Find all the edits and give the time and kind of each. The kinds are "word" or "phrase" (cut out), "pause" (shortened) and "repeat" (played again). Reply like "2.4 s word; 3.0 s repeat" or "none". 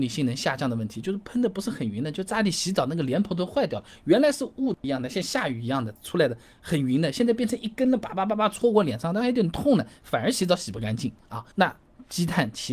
11.5 s pause